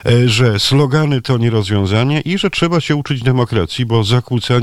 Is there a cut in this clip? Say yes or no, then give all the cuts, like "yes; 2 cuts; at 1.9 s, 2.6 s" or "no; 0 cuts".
no; 0 cuts